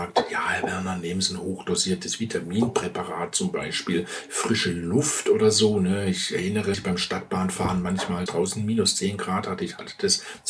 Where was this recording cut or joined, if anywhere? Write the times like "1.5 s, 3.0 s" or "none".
6.7 s, 8.3 s